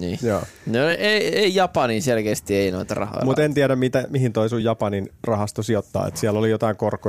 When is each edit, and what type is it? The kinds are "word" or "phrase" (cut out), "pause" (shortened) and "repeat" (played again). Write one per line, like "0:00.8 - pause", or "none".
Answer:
none